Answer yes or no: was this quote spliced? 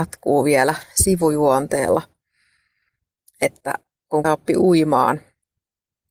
yes